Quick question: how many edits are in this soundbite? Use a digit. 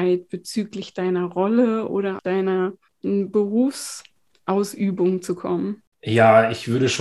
2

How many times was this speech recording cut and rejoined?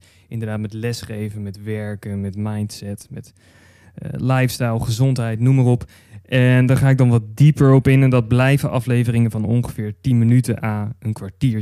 0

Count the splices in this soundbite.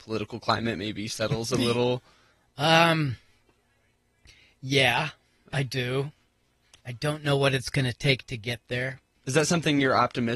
0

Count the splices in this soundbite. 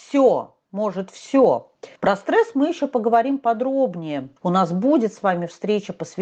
2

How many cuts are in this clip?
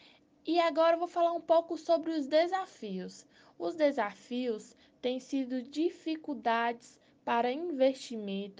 0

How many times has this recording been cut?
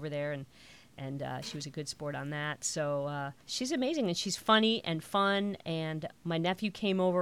1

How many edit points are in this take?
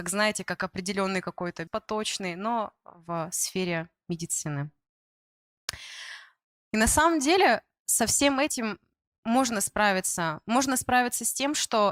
1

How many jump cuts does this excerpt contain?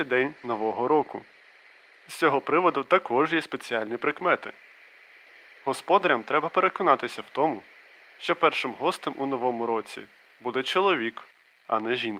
0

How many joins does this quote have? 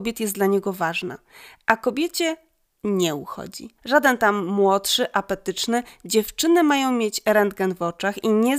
1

